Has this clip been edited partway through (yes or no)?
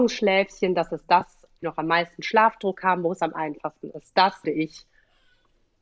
yes